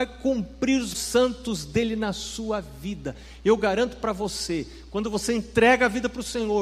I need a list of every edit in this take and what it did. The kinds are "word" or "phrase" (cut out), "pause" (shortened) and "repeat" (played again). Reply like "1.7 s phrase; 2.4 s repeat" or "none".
0.9 s word